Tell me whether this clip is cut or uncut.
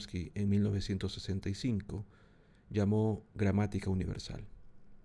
uncut